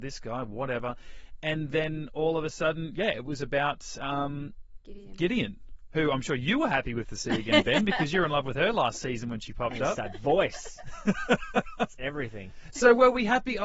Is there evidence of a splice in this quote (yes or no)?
no